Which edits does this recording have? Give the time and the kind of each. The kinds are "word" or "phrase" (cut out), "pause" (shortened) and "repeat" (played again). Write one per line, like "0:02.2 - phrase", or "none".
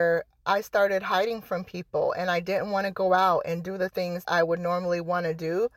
0:04.2 - word